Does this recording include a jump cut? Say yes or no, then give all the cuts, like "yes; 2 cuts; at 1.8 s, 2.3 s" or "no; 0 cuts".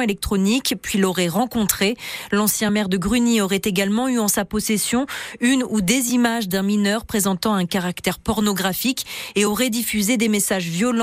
no; 0 cuts